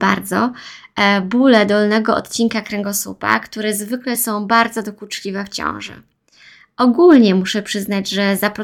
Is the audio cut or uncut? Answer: uncut